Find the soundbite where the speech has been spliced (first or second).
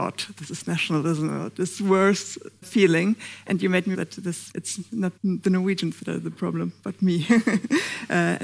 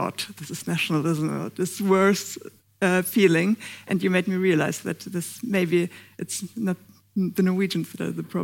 first